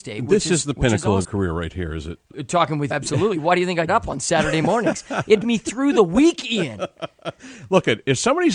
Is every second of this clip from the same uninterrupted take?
no; 5 cuts; at 1.2 s, 2.3 s, 2.9 s, 3.9 s, 5.4 s

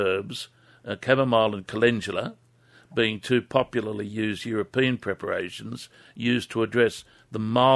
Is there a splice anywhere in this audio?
no; 0 cuts

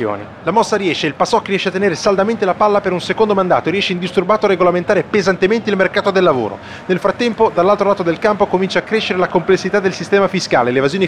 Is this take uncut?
yes; 0 cuts

